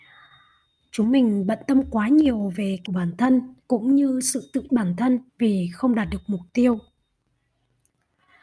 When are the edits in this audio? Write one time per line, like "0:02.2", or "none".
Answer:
0:02.9
0:03.6
0:04.7
0:05.3